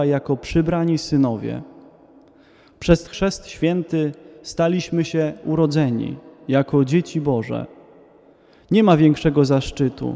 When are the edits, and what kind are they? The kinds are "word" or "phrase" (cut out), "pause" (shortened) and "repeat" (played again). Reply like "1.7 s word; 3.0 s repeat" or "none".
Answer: 3.0 s word; 5.4 s word